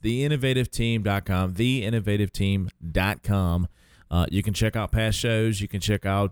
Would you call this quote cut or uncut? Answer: uncut